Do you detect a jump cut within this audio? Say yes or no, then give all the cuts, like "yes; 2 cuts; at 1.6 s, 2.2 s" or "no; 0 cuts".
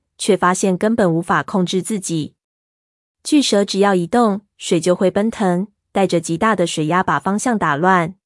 no; 0 cuts